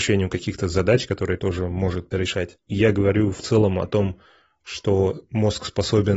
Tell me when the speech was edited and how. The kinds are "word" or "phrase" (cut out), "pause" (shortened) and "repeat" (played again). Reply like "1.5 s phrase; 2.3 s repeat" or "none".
1.4 s word; 2.1 s word